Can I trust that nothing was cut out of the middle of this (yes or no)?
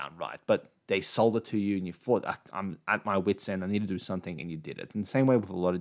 yes